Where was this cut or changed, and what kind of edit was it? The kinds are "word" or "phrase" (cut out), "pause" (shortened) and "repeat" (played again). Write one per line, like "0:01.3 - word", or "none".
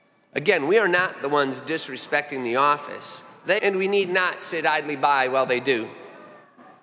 0:03.6 - word